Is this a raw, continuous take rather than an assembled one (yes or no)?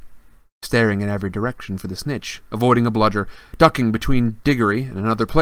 yes